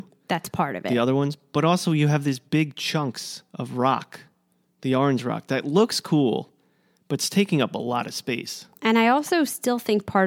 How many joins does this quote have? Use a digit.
0